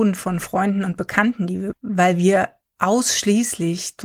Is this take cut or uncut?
cut